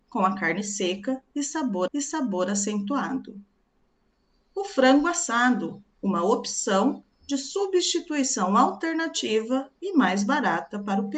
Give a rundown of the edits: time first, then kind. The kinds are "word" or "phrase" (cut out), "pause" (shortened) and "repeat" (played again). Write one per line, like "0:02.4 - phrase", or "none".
0:01.9 - repeat
0:05.9 - pause